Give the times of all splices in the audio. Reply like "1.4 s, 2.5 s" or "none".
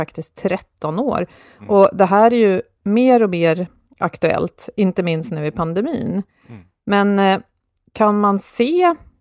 none